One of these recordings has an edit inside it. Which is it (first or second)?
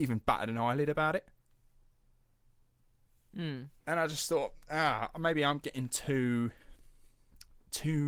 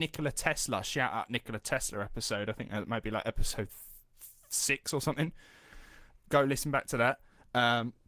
first